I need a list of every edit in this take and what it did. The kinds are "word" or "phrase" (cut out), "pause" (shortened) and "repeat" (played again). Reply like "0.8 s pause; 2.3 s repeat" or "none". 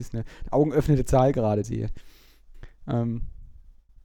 1.6 s phrase